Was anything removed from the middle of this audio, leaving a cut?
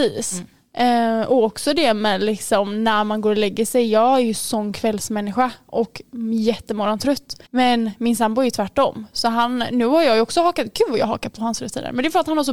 yes; 1 cut; at 7.4 s

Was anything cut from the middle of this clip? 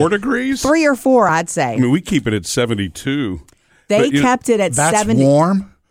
no; 0 cuts

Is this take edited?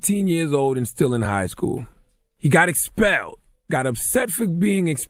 no; 0 cuts

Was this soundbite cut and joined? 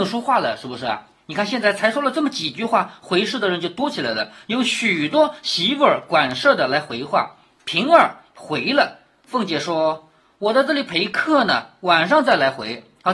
no; 0 cuts

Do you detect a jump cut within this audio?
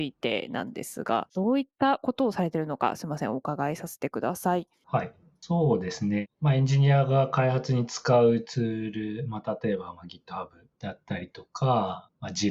no; 0 cuts

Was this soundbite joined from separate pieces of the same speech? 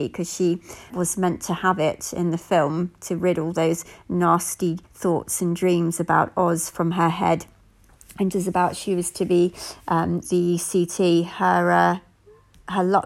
yes; 4 cuts; at 0.9 s, 4.9 s, 8.3 s, 10.2 s

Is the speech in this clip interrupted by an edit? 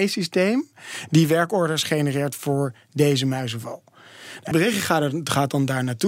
yes; 1 cut; at 4.5 s

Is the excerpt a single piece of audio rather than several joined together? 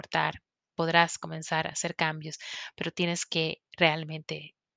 yes; 0 cuts

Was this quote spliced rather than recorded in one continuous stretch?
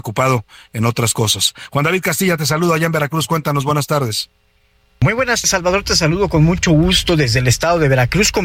yes; 1 cut; at 5.4 s

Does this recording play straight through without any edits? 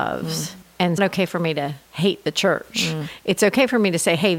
no; 2 cuts; at 1.0 s, 1.8 s

